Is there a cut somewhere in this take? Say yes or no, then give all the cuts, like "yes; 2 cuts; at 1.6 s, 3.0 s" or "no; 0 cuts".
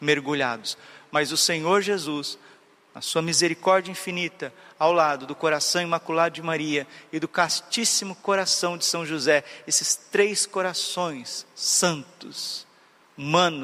no; 0 cuts